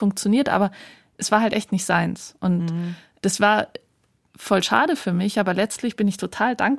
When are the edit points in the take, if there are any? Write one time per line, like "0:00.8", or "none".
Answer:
none